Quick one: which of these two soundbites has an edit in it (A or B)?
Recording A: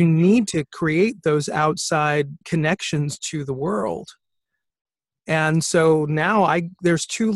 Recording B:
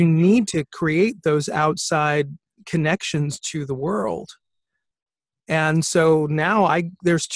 A